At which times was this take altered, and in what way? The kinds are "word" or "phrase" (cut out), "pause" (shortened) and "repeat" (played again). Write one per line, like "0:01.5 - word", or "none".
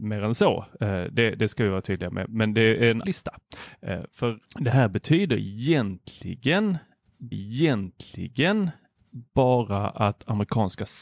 0:03.0 - word
0:04.4 - pause
0:07.3 - repeat